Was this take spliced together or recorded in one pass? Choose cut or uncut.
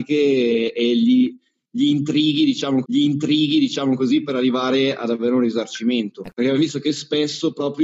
cut